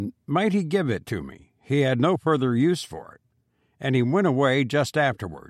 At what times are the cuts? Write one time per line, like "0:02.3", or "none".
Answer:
none